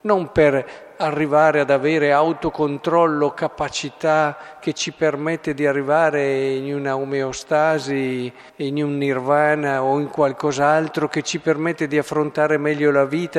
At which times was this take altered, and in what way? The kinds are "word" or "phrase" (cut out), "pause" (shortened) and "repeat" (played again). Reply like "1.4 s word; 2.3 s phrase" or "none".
8.5 s pause